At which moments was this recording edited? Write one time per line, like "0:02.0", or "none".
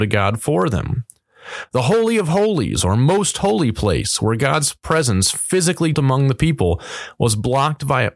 0:05.9